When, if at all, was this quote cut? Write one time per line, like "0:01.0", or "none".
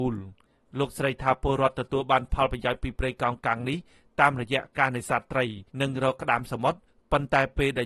0:05.7